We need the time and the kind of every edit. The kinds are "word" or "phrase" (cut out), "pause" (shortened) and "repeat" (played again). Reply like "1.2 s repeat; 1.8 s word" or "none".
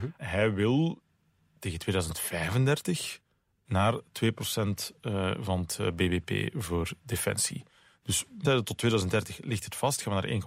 8.4 s phrase